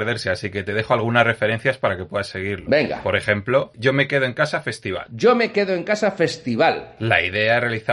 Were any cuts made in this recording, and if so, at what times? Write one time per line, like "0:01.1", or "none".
none